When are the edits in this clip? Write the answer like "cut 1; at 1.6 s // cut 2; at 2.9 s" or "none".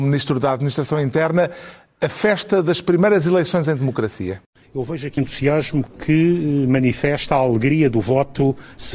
cut 1; at 5.2 s

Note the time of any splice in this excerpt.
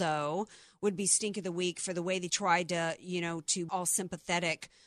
cut 1; at 2.3 s // cut 2; at 3.7 s

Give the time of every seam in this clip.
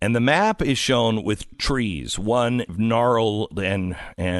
cut 1; at 1.5 s // cut 2; at 2.7 s

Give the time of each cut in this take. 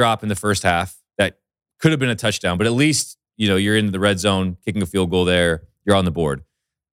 cut 1; at 1.1 s

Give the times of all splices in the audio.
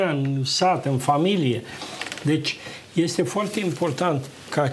none

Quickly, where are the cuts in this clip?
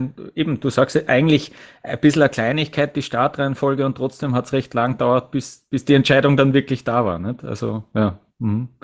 none

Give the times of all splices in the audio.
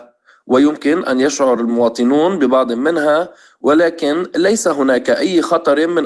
none

